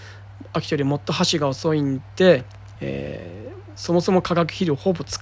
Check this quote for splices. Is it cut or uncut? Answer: uncut